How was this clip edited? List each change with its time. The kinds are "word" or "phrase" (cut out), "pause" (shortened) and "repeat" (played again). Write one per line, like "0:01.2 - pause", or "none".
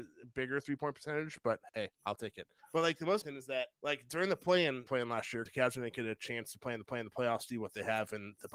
0:02.6 - pause
0:03.2 - word
0:03.7 - pause
0:04.9 - phrase
0:05.5 - word
0:06.9 - repeat
0:07.5 - word